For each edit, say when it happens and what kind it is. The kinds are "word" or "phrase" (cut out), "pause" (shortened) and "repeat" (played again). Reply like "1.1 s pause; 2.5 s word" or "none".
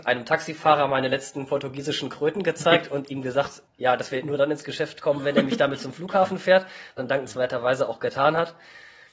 3.7 s word; 7.0 s word